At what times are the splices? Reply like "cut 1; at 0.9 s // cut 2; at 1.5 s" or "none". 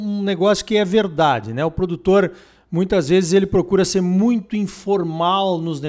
none